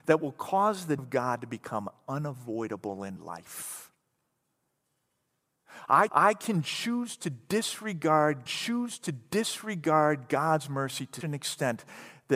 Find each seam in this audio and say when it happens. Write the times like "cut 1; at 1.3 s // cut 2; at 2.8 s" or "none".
cut 1; at 1.0 s // cut 2; at 3.2 s // cut 3; at 6.1 s // cut 4; at 8.5 s // cut 5; at 11.2 s